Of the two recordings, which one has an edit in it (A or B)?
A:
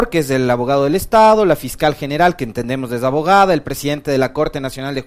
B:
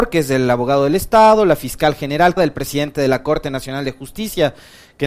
B